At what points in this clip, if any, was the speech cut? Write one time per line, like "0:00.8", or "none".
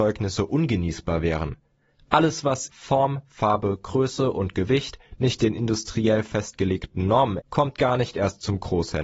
0:02.7
0:07.4